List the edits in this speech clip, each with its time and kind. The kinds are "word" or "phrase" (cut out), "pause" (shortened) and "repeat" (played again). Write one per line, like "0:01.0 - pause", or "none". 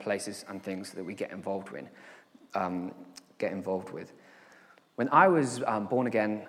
none